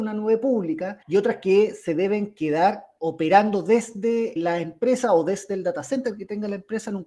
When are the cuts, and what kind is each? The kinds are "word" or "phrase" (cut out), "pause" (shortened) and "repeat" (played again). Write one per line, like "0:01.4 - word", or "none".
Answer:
0:01.0 - pause
0:03.0 - word
0:04.4 - word